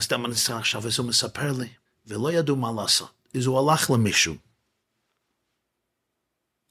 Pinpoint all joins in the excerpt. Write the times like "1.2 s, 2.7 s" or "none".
1.9 s